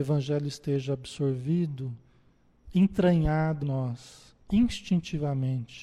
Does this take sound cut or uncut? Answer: cut